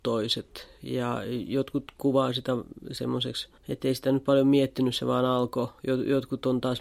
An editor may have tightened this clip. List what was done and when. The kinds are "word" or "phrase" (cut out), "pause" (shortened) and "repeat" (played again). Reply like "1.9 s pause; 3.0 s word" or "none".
3.6 s pause